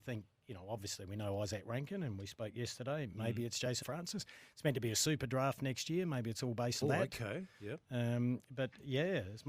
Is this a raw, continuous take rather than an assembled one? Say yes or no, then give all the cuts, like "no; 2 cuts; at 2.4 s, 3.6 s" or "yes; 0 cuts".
no; 2 cuts; at 3.8 s, 6.8 s